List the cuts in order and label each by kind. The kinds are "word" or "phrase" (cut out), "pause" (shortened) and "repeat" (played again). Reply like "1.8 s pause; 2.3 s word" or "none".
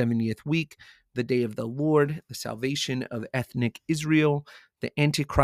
none

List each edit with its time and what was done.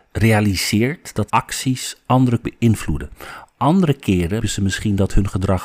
1.3 s word; 2.4 s word; 4.4 s word

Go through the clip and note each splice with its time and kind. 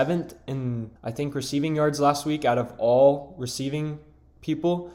1.0 s pause

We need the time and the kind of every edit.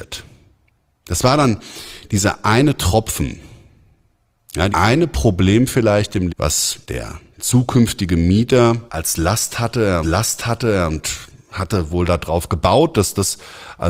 4.7 s word; 6.3 s word; 6.8 s pause; 8.9 s pause; 10.0 s repeat

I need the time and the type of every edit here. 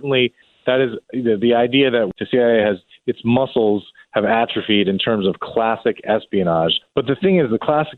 none

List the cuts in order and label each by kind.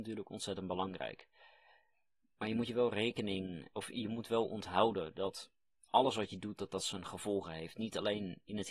none

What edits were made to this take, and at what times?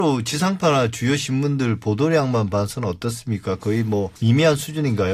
4.2 s pause

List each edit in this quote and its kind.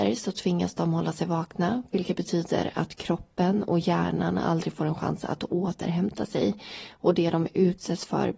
none

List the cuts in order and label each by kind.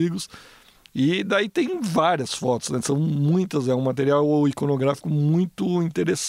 none

